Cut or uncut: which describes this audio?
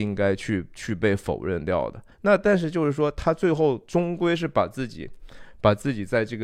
cut